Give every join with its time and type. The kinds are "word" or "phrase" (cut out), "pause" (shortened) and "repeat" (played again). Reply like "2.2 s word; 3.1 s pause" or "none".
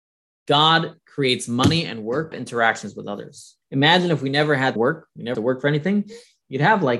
1.0 s pause; 2.3 s phrase; 3.6 s pause; 4.8 s phrase; 5.3 s word